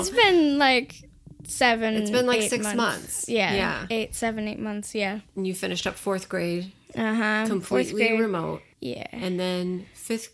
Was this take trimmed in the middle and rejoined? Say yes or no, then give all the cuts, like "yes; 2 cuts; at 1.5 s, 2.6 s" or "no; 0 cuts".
yes; 1 cut; at 8.7 s